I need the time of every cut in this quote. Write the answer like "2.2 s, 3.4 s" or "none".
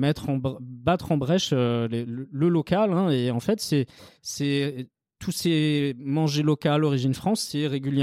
none